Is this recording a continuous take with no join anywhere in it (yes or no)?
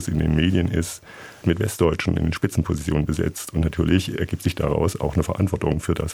no